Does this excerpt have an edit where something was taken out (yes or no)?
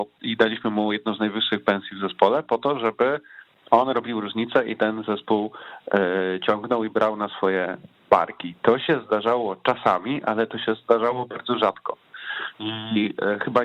yes